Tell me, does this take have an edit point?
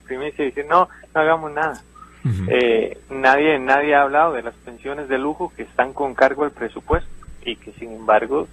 yes; 1 cut; at 3.0 s

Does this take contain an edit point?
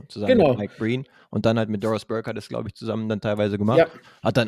no; 0 cuts

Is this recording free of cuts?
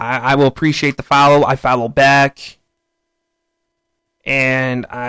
yes; 0 cuts

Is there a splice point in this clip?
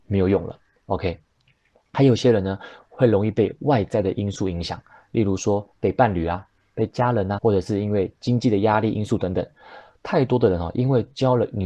yes; 1 cut; at 7.4 s

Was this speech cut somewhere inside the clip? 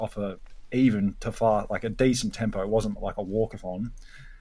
no; 0 cuts

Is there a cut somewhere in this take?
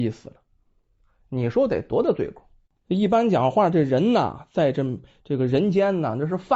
no; 0 cuts

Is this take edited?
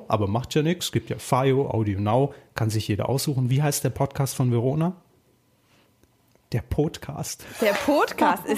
no; 0 cuts

